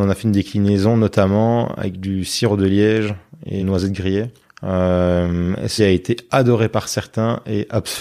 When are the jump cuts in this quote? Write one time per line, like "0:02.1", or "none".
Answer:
0:03.6
0:04.4
0:05.8